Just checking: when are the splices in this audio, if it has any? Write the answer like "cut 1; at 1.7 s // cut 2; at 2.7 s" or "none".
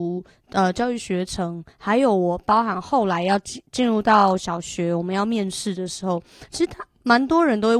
cut 1; at 3.7 s